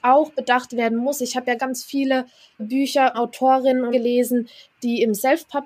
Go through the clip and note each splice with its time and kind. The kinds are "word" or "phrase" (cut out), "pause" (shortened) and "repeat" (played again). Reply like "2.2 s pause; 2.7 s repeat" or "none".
1.6 s word; 2.6 s word; 3.1 s word; 3.9 s word